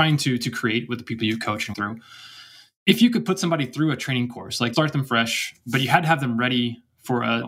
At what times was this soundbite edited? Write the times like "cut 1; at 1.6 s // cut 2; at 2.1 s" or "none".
cut 1; at 1.7 s // cut 2; at 4.7 s